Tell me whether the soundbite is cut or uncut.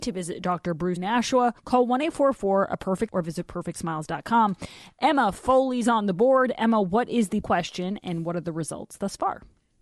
cut